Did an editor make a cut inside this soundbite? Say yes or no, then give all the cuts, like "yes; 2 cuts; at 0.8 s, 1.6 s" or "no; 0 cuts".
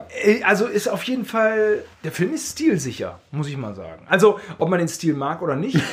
yes; 1 cut; at 1.9 s